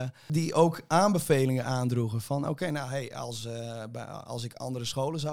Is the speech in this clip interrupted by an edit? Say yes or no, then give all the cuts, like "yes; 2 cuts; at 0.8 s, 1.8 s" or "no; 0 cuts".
no; 0 cuts